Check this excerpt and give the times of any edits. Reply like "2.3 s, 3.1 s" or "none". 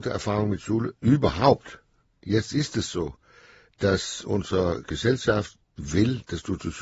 none